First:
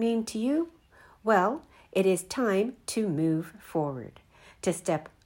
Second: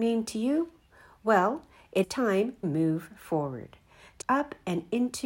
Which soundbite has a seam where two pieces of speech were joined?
second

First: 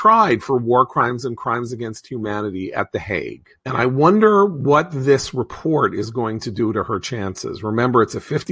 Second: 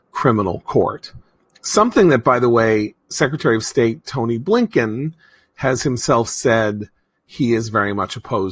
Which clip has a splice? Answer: first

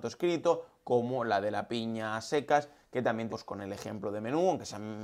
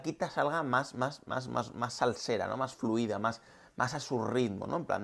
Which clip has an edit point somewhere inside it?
first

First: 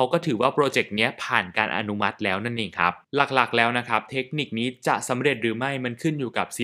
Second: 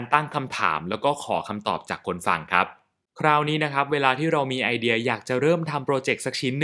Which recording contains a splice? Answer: first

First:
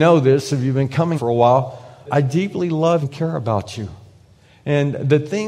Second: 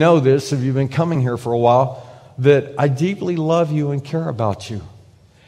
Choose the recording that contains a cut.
first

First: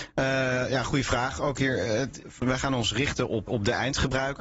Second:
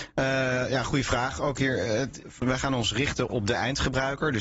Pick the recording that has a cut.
second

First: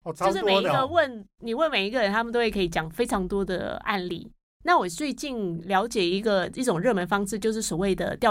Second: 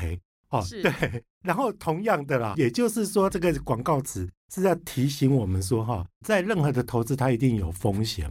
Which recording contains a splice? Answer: second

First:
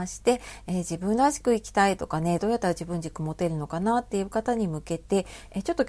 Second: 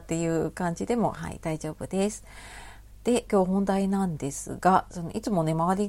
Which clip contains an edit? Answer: second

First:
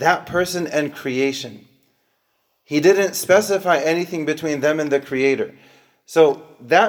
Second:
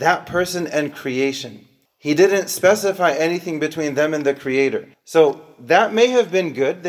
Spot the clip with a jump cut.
second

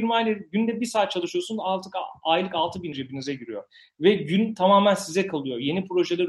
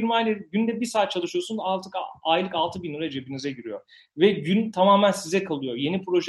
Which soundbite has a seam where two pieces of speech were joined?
first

